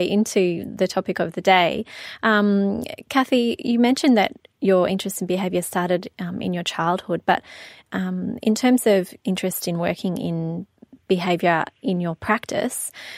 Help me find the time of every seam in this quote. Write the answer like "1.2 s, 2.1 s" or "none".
none

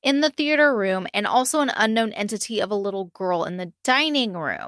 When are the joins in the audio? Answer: none

